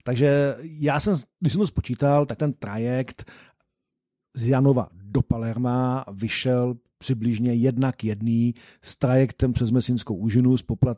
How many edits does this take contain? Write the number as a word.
one